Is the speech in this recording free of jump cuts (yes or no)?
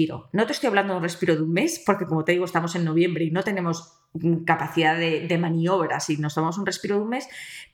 yes